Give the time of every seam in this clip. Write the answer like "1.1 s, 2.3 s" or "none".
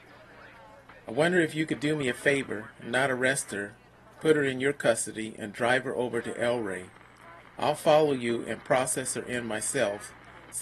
none